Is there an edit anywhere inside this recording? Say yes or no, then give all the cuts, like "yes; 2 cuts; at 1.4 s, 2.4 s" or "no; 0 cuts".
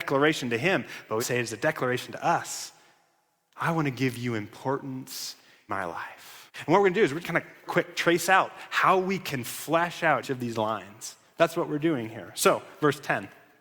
yes; 6 cuts; at 1.2 s, 5.7 s, 6.5 s, 7.2 s, 7.7 s, 10.2 s